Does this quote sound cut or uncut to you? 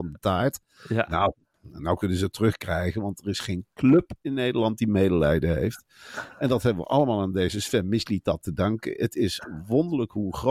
uncut